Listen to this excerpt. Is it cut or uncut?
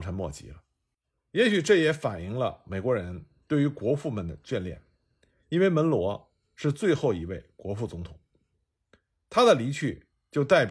uncut